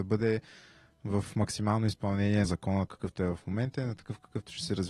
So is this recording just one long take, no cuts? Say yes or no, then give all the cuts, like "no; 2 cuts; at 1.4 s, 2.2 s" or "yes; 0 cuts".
no; 2 cuts; at 2.4 s, 2.9 s